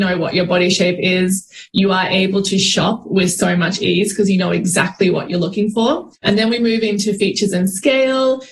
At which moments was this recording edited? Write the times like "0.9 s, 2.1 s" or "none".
6.2 s